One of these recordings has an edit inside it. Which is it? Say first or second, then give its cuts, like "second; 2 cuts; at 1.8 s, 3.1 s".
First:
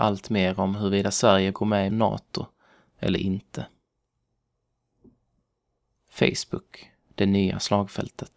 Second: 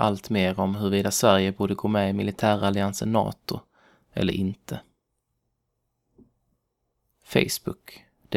first; 2 cuts; at 1.5 s, 1.9 s